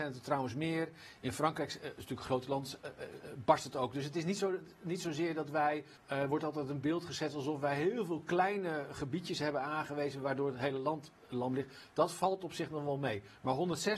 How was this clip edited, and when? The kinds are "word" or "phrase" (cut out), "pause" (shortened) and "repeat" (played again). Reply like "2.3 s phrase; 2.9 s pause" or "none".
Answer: 6.0 s pause